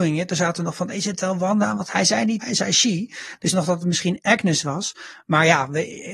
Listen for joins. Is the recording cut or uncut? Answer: cut